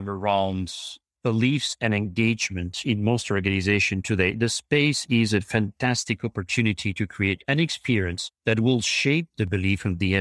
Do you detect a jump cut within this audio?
yes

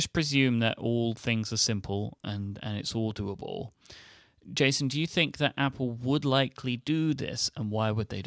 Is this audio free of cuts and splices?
yes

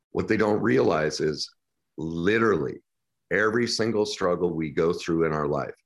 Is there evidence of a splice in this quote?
yes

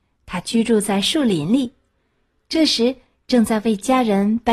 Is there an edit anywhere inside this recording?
no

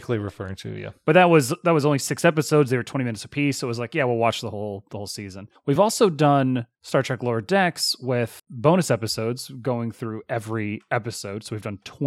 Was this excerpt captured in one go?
yes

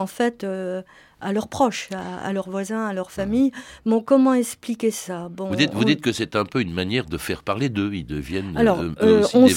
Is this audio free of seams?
yes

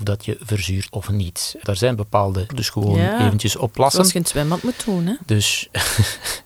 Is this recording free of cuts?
no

